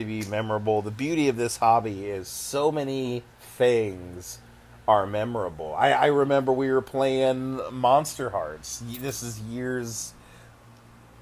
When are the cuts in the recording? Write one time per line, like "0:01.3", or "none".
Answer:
0:03.3